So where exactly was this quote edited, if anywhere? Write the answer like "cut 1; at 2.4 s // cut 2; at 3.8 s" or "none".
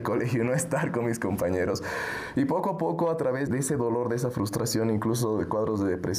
cut 1; at 3.5 s